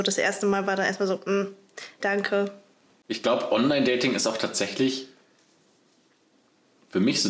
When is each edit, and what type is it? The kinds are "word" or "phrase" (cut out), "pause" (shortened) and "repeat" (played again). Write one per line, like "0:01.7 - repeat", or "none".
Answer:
0:02.0 - word